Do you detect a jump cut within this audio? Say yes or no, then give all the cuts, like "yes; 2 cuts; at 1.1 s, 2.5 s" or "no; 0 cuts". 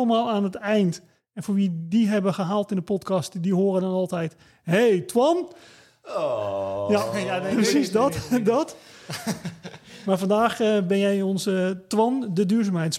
no; 0 cuts